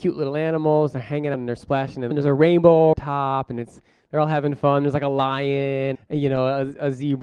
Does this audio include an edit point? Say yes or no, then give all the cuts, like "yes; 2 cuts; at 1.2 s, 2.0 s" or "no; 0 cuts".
yes; 4 cuts; at 1.3 s, 2.1 s, 2.9 s, 5.9 s